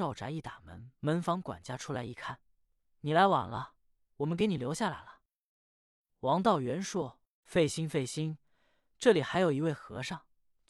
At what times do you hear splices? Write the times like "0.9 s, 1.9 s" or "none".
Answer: 1.0 s, 2.8 s